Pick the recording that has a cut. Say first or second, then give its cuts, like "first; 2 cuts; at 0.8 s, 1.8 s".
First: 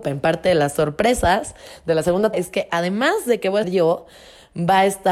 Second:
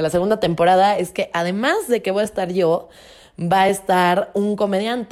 first; 2 cuts; at 2.3 s, 3.6 s